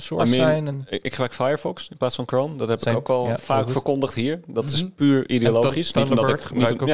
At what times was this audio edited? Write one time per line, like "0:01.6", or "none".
none